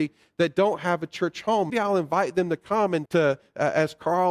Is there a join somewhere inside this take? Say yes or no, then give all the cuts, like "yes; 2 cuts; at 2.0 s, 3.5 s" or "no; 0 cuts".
yes; 2 cuts; at 1.7 s, 3.1 s